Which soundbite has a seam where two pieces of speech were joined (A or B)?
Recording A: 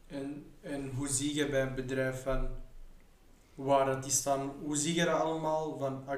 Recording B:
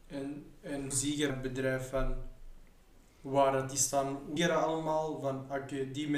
B